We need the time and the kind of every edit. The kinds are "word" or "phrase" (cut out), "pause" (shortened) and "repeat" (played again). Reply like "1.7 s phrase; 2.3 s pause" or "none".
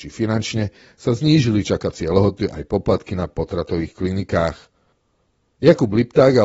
none